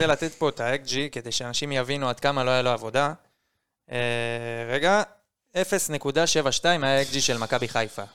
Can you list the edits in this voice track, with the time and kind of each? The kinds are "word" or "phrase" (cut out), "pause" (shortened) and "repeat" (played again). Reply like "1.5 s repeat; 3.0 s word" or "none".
none